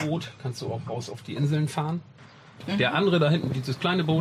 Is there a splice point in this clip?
no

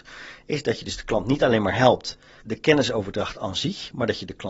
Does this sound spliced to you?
yes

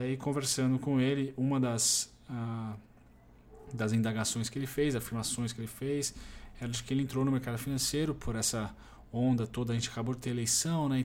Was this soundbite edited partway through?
no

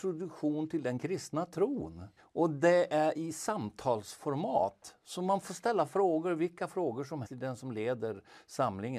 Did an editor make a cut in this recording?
yes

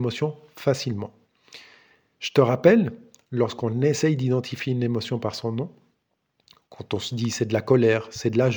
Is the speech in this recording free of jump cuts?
yes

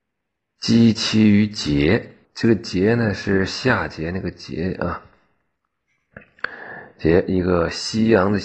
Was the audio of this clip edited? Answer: yes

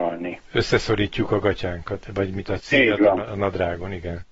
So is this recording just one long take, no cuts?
yes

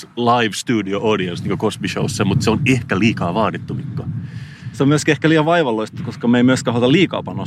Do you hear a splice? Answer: no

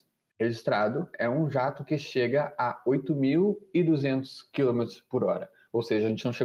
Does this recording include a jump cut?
no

